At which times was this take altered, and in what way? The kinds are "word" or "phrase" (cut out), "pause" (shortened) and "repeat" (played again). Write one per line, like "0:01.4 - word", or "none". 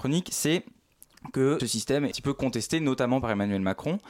0:01.6 - word
0:02.1 - word